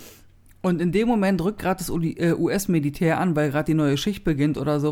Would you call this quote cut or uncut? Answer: cut